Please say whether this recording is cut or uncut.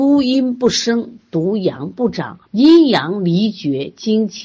cut